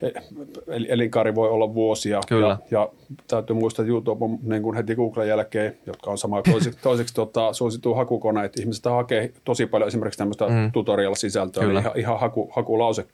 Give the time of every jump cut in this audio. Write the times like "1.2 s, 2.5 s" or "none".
6.4 s